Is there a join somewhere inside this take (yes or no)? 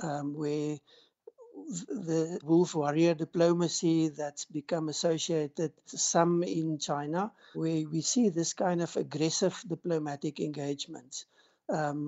yes